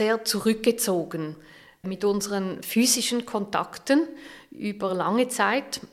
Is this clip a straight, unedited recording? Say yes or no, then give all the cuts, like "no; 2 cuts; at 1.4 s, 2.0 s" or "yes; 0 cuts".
yes; 0 cuts